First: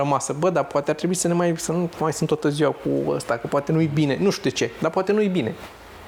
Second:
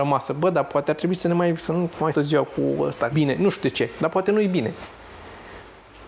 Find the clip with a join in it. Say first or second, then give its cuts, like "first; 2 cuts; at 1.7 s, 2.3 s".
second; 2 cuts; at 2.1 s, 3.1 s